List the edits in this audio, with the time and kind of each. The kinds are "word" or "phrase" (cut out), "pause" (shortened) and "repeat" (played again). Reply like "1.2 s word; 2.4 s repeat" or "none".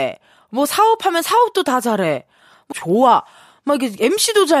2.7 s phrase